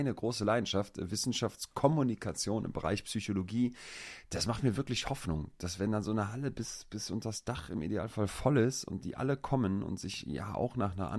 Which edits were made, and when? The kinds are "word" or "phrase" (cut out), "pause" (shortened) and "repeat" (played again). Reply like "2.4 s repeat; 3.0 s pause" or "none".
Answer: none